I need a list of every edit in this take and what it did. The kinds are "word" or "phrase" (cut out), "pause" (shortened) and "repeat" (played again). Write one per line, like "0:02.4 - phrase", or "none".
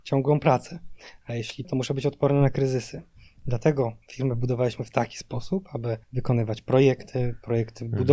0:01.6 - word
0:04.0 - pause
0:06.0 - pause